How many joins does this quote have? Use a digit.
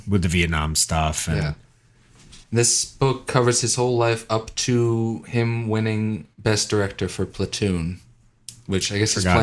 2